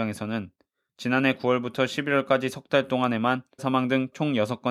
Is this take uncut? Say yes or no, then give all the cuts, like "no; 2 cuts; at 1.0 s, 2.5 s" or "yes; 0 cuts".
no; 1 cut; at 3.6 s